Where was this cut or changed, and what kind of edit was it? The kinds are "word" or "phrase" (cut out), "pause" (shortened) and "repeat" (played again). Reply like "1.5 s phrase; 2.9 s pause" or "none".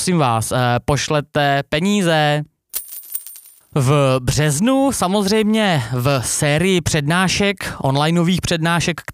3.6 s pause